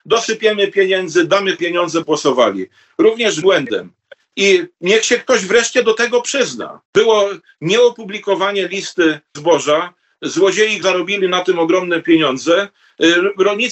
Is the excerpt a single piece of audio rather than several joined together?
no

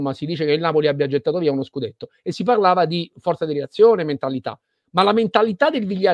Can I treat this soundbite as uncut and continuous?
yes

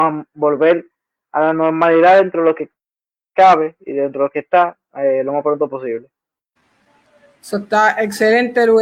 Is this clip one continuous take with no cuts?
yes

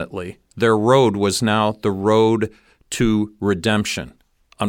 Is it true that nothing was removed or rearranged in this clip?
yes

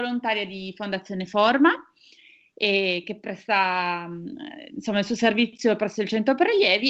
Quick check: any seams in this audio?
no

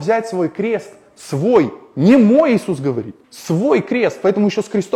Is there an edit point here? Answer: yes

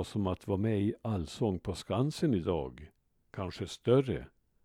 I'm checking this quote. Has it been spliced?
no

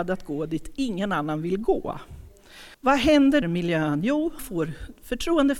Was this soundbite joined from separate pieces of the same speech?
yes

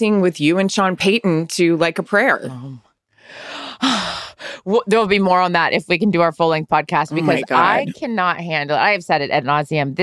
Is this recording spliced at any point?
no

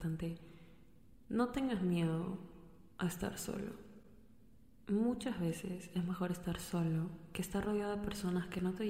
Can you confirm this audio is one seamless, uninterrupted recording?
yes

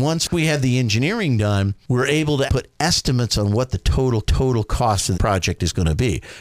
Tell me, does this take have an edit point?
yes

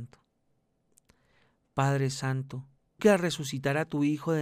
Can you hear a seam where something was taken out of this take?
yes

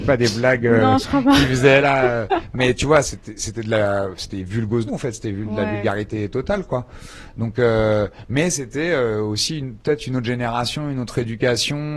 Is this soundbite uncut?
no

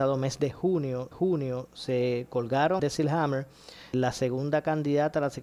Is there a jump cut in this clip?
yes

